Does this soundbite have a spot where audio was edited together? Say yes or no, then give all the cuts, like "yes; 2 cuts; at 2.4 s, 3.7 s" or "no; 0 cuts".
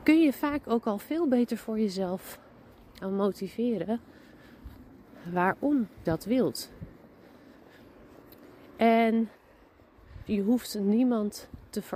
yes; 3 cuts; at 3.0 s, 6.0 s, 10.3 s